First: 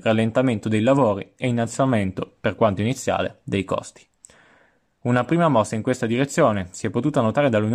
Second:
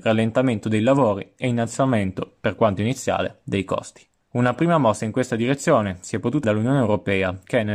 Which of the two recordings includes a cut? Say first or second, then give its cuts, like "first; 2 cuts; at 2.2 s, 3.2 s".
second; 2 cuts; at 4.2 s, 6.4 s